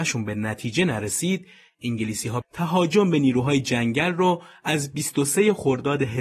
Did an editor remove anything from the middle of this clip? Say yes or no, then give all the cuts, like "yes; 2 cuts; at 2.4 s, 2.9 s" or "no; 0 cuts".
yes; 1 cut; at 2.4 s